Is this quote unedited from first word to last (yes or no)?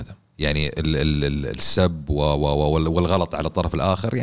yes